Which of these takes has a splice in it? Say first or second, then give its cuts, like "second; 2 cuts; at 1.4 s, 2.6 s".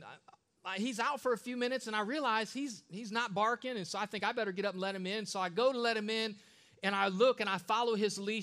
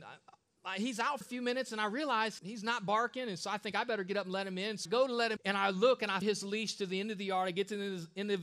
second; 5 cuts; at 1.2 s, 2.4 s, 4.9 s, 5.4 s, 6.2 s